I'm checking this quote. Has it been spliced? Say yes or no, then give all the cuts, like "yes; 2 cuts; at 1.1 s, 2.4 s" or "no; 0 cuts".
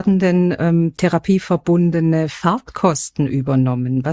no; 0 cuts